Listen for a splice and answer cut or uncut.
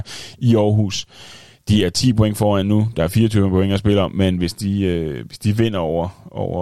uncut